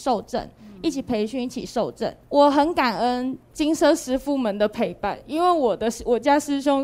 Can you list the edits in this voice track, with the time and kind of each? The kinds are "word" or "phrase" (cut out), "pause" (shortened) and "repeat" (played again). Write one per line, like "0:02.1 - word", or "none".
0:02.2 - pause
0:03.4 - pause